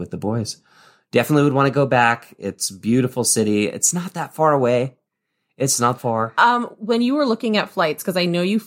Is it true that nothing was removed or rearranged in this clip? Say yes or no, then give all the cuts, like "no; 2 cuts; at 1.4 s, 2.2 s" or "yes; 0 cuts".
no; 1 cut; at 6.0 s